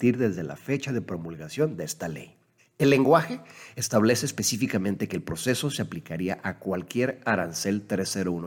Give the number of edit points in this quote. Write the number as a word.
one